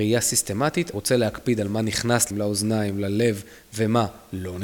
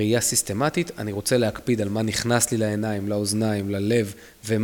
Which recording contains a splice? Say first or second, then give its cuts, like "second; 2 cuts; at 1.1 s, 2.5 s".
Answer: first; 2 cuts; at 0.9 s, 2.3 s